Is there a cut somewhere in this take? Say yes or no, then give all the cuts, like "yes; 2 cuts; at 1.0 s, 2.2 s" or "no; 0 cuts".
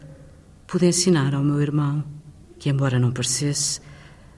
yes; 1 cut; at 2.4 s